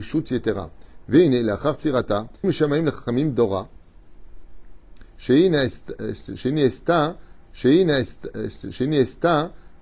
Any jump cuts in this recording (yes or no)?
yes